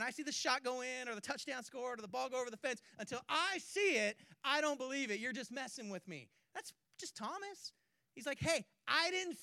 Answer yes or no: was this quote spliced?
no